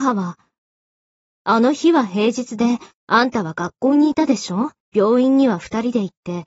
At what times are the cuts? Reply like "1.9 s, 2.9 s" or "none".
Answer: 4.8 s